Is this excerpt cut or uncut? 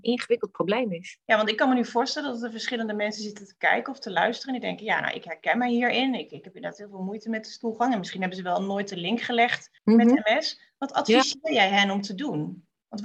cut